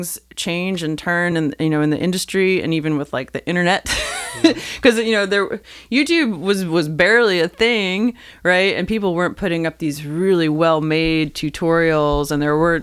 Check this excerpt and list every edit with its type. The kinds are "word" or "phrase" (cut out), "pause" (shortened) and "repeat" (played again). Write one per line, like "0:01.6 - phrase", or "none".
none